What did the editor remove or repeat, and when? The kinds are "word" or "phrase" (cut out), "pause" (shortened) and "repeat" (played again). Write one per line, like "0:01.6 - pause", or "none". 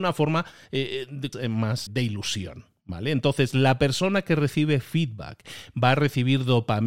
0:01.3 - phrase
0:01.9 - word